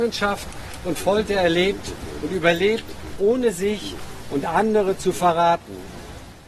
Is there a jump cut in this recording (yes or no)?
no